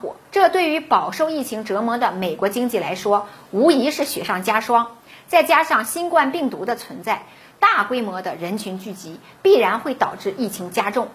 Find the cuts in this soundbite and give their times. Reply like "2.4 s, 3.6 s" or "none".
none